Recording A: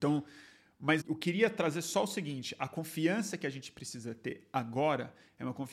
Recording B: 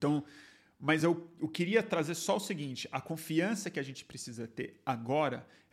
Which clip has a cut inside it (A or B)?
A